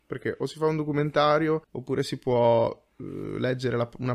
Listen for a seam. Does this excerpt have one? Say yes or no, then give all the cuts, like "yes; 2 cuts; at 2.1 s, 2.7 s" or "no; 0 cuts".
yes; 1 cut; at 1.6 s